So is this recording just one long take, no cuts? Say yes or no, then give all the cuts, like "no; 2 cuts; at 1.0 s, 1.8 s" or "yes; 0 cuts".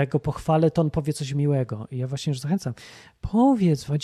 yes; 0 cuts